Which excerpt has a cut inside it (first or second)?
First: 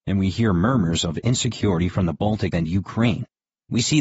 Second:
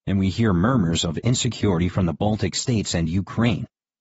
first